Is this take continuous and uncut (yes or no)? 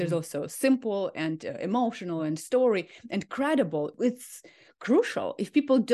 yes